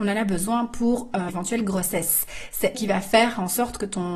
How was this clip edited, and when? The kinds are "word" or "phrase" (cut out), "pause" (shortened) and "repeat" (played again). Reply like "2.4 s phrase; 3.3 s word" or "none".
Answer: 1.3 s word; 2.7 s word